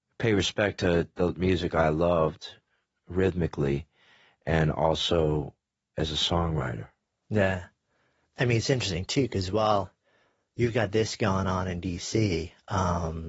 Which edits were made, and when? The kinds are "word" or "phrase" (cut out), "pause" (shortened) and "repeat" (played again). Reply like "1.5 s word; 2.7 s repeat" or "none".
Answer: none